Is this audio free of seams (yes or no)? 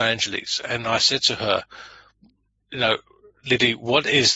yes